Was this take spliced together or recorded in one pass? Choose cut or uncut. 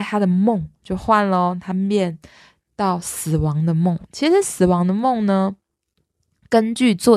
uncut